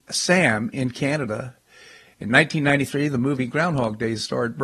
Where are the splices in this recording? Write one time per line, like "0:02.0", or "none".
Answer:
none